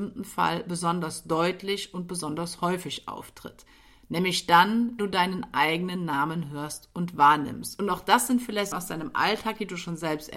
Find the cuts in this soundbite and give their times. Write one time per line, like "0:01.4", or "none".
0:05.0
0:08.7